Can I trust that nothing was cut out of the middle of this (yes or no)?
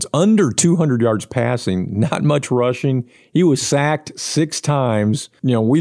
yes